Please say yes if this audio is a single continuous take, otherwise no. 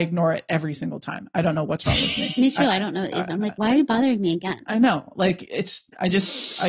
yes